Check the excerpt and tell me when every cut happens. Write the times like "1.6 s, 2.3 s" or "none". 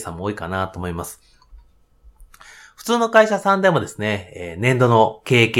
none